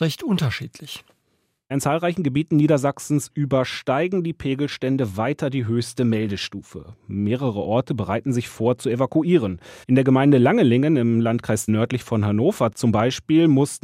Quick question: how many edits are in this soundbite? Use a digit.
2